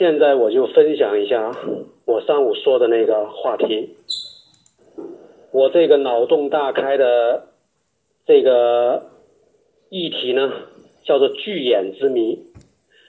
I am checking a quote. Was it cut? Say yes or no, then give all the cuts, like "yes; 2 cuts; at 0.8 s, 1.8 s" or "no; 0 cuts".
no; 0 cuts